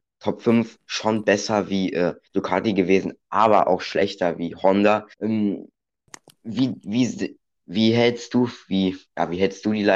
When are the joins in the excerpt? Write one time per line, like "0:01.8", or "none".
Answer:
0:02.2
0:05.1